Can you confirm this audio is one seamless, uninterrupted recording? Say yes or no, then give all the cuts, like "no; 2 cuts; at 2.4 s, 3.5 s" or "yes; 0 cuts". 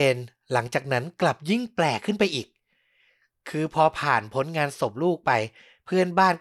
yes; 0 cuts